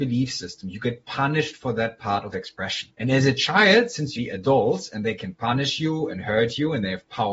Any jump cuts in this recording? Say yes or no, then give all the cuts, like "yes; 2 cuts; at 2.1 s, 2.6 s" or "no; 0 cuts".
yes; 3 cuts; at 2.3 s, 2.9 s, 4.2 s